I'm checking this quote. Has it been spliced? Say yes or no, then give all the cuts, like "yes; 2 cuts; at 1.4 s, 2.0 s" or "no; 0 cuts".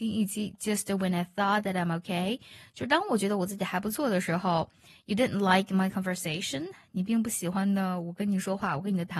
no; 0 cuts